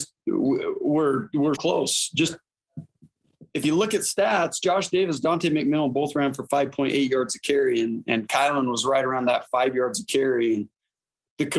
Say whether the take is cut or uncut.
cut